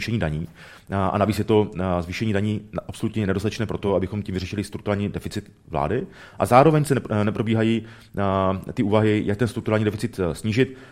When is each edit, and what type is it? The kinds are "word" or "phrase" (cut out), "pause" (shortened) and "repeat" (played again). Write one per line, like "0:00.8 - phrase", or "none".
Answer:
none